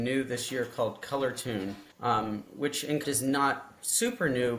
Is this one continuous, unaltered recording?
no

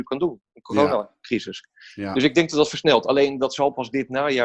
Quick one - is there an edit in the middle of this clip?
no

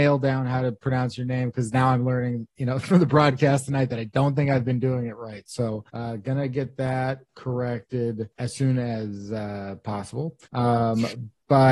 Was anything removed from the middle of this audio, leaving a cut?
yes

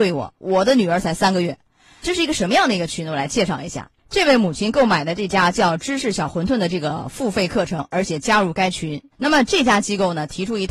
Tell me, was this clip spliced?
yes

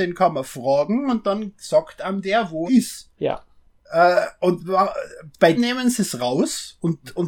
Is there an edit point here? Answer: yes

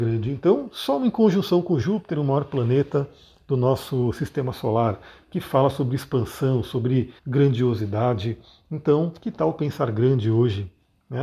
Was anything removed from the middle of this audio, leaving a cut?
yes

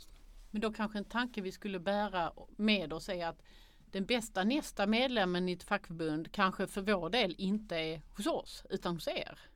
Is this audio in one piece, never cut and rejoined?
yes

